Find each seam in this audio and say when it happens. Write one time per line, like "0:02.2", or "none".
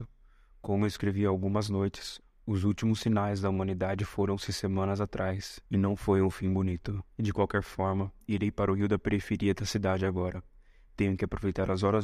0:05.7
0:07.1